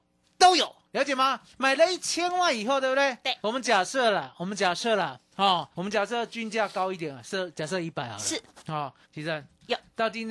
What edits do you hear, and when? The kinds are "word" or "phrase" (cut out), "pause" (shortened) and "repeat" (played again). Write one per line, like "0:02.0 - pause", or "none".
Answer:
0:01.5 - pause
0:03.4 - pause
0:05.7 - pause
0:09.0 - pause